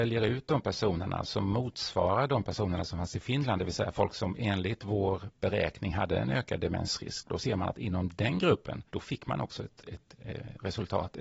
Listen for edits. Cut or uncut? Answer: cut